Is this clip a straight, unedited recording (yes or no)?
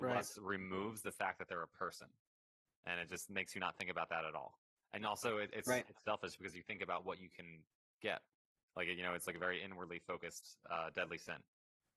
yes